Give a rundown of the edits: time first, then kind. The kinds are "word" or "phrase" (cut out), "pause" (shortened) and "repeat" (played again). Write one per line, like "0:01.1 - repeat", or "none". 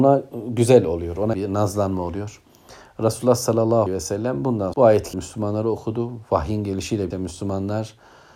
0:01.3 - word
0:03.9 - word
0:04.7 - word
0:05.1 - word
0:07.1 - word